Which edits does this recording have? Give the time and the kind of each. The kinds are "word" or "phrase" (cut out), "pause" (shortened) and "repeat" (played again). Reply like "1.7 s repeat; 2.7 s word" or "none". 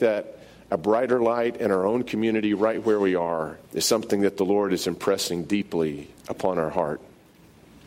3.6 s pause; 6.2 s pause